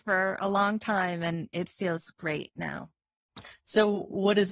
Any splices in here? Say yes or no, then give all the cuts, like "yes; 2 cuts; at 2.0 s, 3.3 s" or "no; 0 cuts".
no; 0 cuts